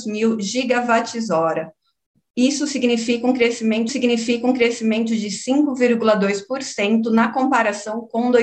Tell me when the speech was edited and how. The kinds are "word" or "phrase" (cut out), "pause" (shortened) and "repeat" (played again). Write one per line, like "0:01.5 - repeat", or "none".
0:03.9 - repeat